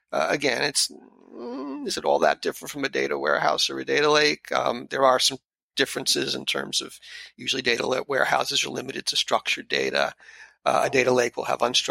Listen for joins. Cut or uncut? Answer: uncut